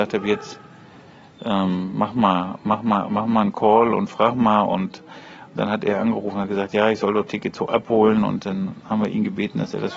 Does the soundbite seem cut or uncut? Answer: uncut